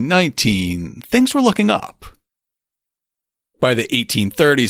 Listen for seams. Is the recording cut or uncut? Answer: uncut